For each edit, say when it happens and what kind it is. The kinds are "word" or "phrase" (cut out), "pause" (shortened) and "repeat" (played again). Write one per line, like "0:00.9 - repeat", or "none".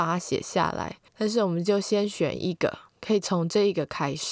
0:01.1 - pause
0:02.9 - pause